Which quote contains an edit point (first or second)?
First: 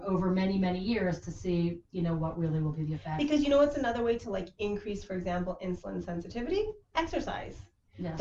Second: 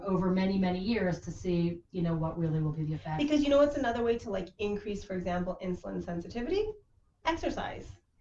first